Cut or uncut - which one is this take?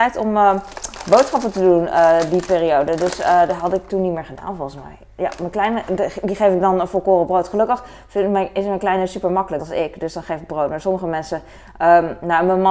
cut